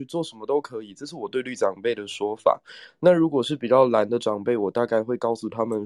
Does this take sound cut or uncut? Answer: uncut